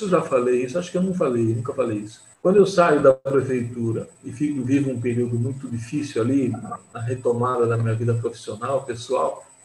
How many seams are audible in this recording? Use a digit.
0